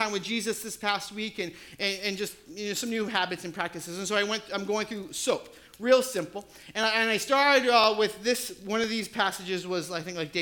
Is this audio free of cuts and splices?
yes; 0 cuts

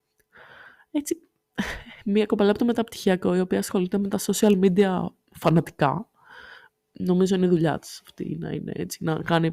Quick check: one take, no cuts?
yes; 0 cuts

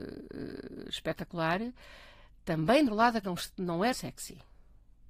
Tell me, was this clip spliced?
yes; 3 cuts; at 2.9 s, 3.2 s, 3.9 s

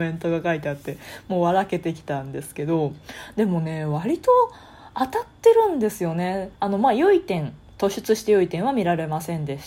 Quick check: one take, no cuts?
no; 1 cut; at 6.6 s

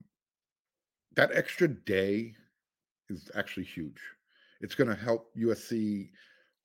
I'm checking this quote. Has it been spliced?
no; 0 cuts

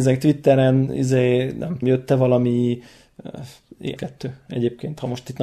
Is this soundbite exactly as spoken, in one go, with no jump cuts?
no; 2 cuts; at 1.8 s, 4.0 s

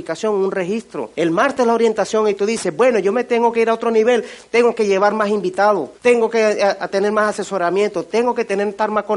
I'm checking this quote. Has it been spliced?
yes; 2 cuts; at 1.1 s, 6.0 s

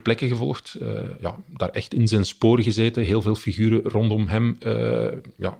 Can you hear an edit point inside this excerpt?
no; 0 cuts

